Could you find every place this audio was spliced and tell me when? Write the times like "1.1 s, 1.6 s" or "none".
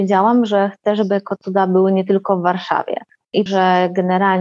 3.5 s